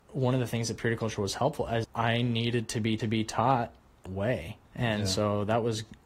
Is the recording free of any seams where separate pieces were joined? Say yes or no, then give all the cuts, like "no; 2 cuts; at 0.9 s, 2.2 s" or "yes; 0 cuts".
no; 4 cuts; at 1.8 s, 3.0 s, 4.1 s, 4.7 s